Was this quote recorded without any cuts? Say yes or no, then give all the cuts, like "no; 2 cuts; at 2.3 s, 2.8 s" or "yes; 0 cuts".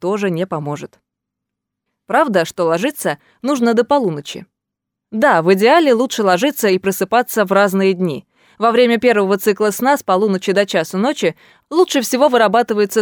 yes; 0 cuts